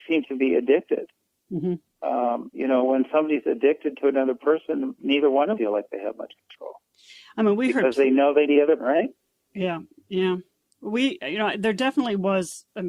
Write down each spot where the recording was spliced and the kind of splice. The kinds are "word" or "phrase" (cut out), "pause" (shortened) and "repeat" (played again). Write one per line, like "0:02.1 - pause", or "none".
0:02.5 - word
0:05.0 - word
0:05.6 - word
0:08.5 - word
0:08.8 - word